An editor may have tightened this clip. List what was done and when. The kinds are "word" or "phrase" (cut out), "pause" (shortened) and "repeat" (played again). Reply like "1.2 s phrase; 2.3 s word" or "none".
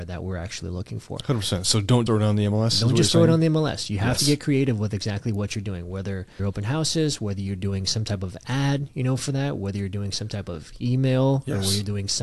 2.1 s word; 6.4 s phrase